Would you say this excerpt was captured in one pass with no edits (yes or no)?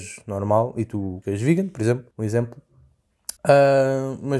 no